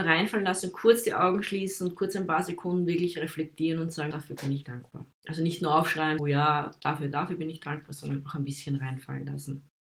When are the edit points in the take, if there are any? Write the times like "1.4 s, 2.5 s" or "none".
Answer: 4.1 s, 4.6 s, 6.2 s, 7.1 s

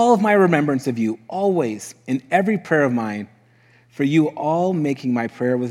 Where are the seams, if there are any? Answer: none

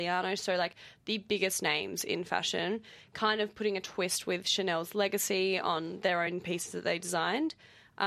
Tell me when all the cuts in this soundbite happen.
none

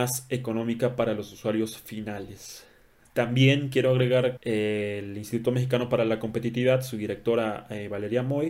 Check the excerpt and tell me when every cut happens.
4.4 s

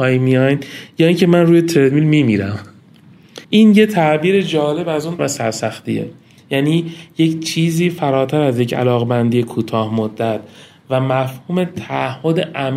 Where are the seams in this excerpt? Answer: 3.4 s, 5.2 s

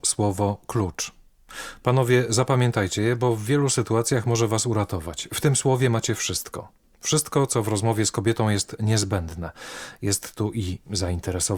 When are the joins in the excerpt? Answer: none

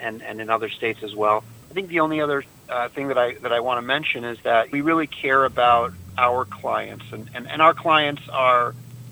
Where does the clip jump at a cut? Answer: 1.6 s, 4.7 s

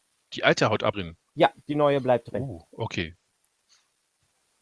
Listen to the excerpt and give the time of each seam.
0.9 s

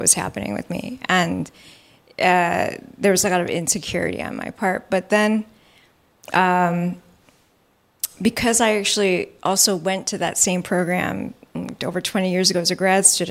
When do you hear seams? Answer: none

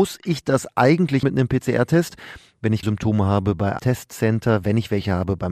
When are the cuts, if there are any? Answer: 1.2 s, 2.8 s, 3.8 s

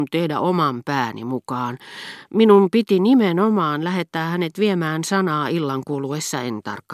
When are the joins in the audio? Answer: none

